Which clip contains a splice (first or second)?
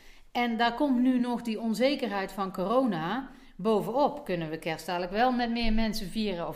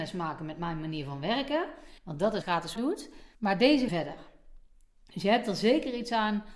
second